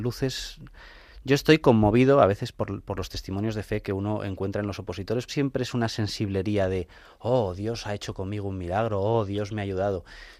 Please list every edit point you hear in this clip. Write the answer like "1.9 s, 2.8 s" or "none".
5.3 s